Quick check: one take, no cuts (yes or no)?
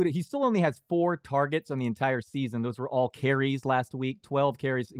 yes